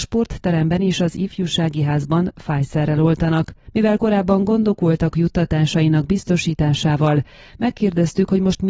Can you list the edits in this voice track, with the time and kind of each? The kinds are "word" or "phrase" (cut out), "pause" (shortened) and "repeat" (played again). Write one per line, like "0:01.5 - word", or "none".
0:05.1 - phrase